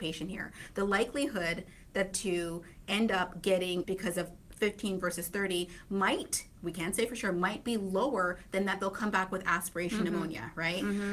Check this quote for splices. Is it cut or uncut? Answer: cut